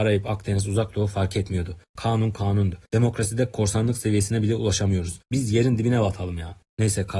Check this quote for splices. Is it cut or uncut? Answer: uncut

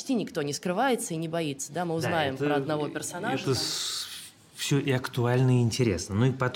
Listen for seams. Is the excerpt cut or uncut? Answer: uncut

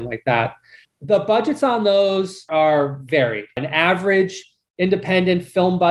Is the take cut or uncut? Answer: uncut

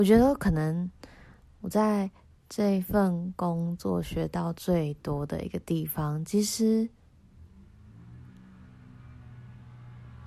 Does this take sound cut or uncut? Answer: uncut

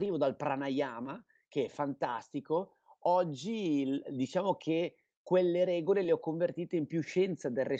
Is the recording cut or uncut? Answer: uncut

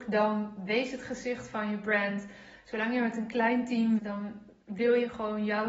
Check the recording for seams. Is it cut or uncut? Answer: cut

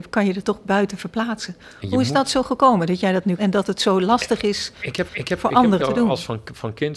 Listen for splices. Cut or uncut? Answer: cut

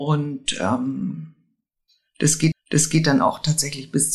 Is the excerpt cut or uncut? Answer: cut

